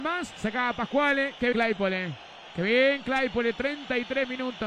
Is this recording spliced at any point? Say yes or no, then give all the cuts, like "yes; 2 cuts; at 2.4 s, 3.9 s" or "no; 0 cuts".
yes; 1 cut; at 1.5 s